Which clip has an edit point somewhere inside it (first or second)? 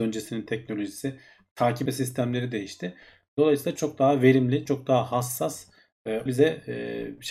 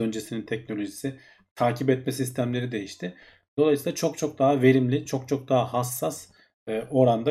first